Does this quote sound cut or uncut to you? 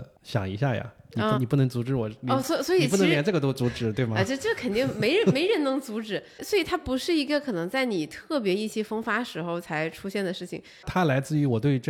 cut